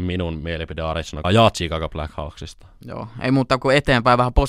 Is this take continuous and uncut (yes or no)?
no